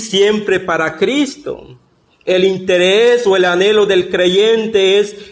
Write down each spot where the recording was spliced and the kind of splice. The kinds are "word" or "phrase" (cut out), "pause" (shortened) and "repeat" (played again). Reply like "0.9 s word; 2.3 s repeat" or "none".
none